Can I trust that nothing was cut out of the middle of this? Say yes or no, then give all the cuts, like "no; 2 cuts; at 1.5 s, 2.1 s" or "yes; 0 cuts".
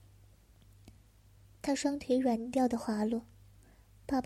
yes; 0 cuts